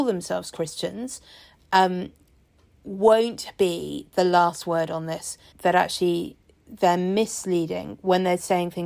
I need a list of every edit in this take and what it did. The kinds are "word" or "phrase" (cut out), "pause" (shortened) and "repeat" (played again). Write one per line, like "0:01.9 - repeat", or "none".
0:05.5 - word